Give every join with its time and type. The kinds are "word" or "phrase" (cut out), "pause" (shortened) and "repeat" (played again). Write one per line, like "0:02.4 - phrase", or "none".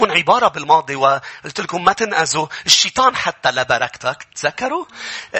none